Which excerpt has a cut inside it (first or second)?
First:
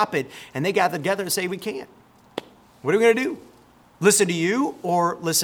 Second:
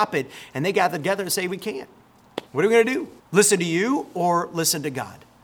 second